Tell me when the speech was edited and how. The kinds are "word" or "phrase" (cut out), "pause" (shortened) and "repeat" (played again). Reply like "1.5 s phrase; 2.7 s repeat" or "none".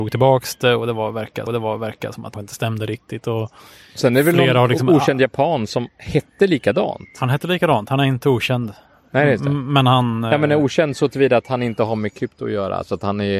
1.5 s repeat; 2.3 s phrase